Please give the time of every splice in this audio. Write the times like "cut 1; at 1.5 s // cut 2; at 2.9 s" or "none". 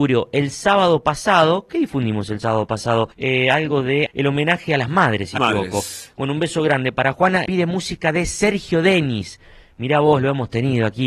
cut 1; at 3.1 s // cut 2; at 4.1 s // cut 3; at 5.4 s // cut 4; at 7.5 s